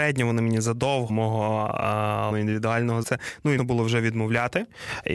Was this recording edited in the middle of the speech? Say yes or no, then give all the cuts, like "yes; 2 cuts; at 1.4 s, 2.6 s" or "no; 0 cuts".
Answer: yes; 4 cuts; at 1.1 s, 2.3 s, 3.0 s, 3.6 s